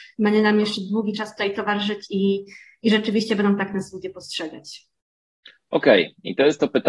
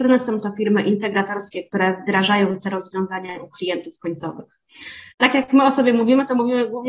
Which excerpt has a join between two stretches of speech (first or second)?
second